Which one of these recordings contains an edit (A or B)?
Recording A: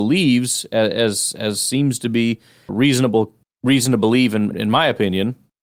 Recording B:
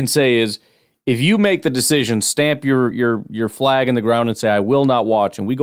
A